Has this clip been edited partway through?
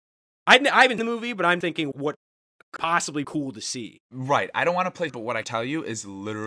yes; 7 cuts; at 1.0 s, 1.6 s, 1.9 s, 2.8 s, 3.2 s, 5.1 s, 5.4 s

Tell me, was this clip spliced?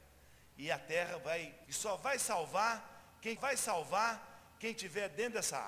yes; 2 cuts; at 1.7 s, 3.4 s

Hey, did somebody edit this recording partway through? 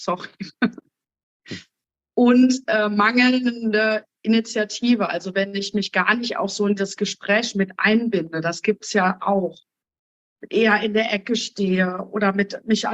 no; 0 cuts

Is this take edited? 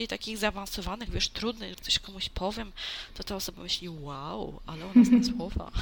yes; 3 cuts; at 1.1 s, 1.7 s, 3.5 s

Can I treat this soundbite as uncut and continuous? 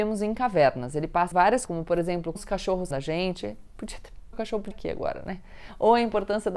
no; 6 cuts; at 1.3 s, 1.7 s, 2.4 s, 2.9 s, 4.3 s, 4.7 s

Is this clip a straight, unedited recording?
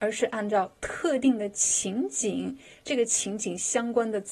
yes; 0 cuts

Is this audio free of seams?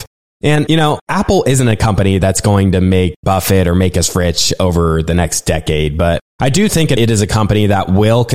yes; 0 cuts

